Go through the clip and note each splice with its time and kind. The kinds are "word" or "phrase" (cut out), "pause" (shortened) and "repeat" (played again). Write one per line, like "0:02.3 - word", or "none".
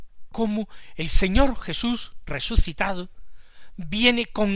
none